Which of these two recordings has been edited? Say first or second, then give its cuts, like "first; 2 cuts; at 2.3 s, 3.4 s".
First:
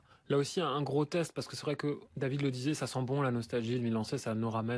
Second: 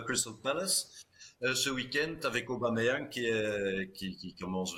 first; 1 cut; at 2.1 s